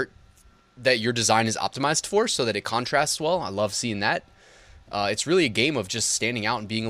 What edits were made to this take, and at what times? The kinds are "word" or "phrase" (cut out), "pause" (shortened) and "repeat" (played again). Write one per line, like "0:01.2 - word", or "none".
none